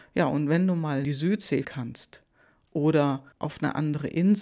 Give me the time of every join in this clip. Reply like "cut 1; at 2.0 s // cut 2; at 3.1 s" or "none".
cut 1; at 1.0 s // cut 2; at 1.6 s // cut 3; at 3.3 s